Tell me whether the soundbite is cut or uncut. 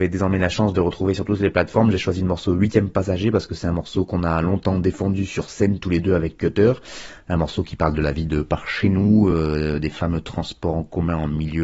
uncut